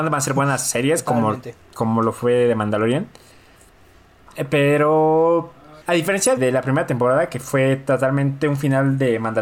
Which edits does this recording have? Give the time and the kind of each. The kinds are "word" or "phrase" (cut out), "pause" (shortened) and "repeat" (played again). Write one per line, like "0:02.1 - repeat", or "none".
0:05.8 - pause
0:06.4 - word